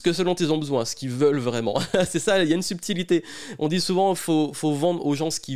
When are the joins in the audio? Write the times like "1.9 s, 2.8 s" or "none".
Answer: none